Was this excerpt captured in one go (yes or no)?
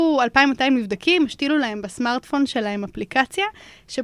yes